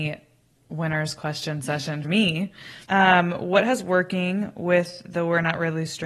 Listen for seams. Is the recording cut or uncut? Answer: cut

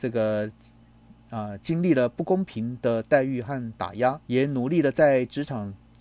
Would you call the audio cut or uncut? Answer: cut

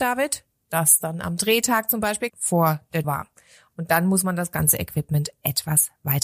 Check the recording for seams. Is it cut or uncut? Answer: cut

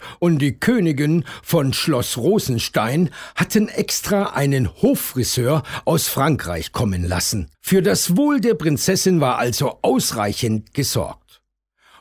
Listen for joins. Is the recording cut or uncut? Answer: cut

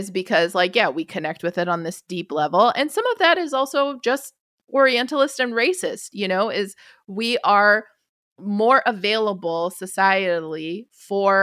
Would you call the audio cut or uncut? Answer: uncut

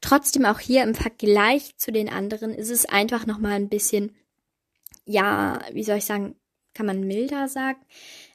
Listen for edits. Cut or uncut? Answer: uncut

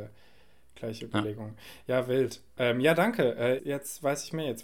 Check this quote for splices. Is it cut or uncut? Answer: cut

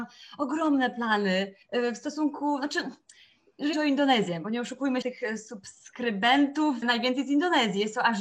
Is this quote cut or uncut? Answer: cut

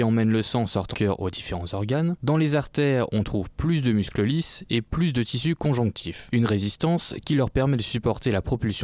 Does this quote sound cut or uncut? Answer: cut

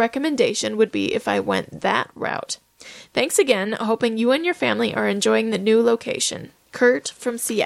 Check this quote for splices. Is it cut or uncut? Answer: uncut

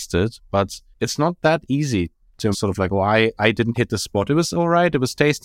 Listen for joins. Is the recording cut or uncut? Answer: cut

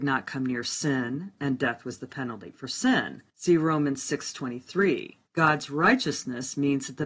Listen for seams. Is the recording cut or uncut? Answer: cut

